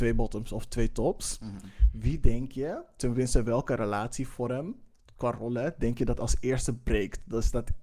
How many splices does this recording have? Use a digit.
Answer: 0